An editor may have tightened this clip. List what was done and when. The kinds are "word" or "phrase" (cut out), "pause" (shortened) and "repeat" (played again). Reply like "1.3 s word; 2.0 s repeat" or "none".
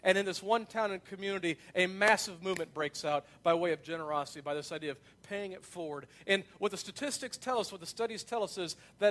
none